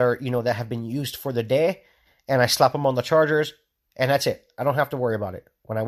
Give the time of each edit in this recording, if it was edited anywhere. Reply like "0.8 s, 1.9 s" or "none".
none